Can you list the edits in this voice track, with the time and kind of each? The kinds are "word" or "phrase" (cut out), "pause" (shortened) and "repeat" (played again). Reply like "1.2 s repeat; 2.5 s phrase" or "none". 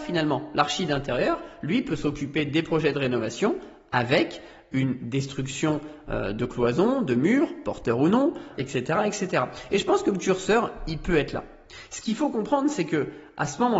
8.5 s word